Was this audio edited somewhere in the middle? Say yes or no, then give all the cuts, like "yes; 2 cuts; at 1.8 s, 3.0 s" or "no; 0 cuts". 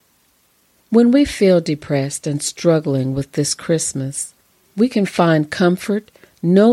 no; 0 cuts